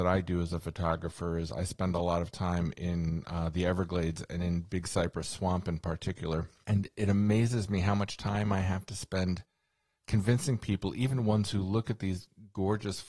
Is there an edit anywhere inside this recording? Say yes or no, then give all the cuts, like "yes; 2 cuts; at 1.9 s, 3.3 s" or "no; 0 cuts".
no; 0 cuts